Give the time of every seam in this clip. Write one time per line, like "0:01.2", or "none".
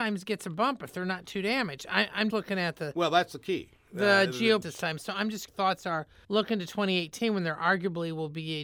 0:02.3
0:04.6
0:05.5
0:06.2